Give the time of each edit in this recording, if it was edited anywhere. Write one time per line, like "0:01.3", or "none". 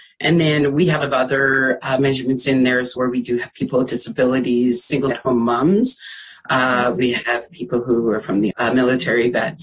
0:01.0
0:03.0
0:05.1
0:08.5